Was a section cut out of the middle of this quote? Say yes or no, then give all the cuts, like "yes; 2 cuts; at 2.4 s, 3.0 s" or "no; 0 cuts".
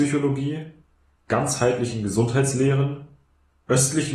no; 0 cuts